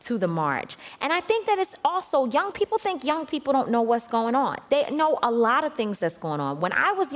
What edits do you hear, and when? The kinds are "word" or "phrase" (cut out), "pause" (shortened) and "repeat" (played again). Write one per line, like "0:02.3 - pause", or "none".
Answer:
0:02.5 - word